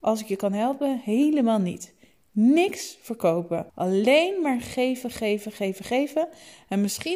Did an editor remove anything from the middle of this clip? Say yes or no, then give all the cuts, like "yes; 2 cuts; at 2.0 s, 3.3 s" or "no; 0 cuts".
yes; 1 cut; at 3.7 s